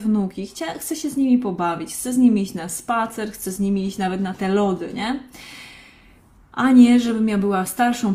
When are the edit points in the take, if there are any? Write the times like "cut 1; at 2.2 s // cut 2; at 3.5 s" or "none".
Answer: none